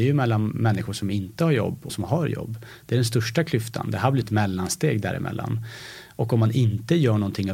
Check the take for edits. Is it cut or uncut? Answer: cut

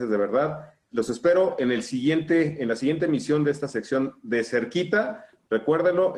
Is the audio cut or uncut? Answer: uncut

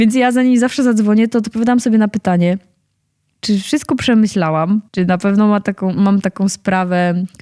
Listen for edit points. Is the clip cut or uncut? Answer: cut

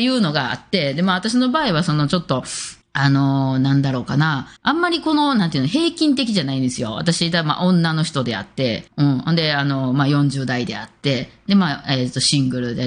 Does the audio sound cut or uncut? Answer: cut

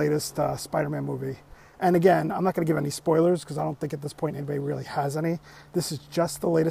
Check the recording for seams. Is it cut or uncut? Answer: uncut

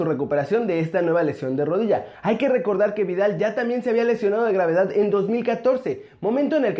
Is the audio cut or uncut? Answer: uncut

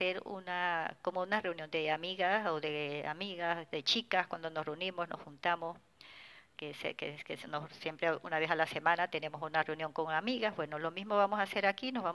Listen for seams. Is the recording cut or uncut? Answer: uncut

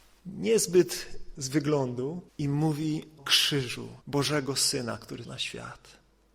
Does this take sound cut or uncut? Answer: cut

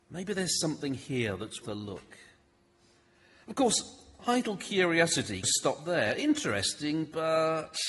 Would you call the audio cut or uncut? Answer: cut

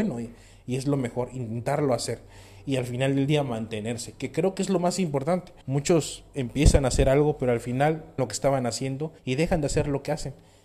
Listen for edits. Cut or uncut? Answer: cut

